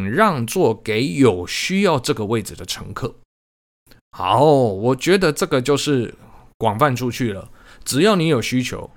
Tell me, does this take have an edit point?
no; 0 cuts

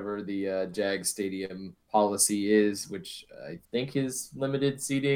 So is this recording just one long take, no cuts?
no; 2 cuts; at 1.8 s, 3.6 s

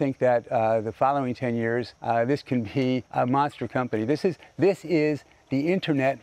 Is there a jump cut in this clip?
yes; 2 cuts; at 2.0 s, 3.1 s

